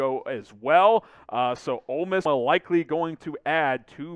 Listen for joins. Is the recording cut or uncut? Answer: cut